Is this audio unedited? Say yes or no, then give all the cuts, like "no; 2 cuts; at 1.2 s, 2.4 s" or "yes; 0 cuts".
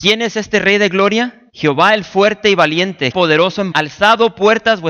no; 3 cuts; at 1.5 s, 3.1 s, 3.7 s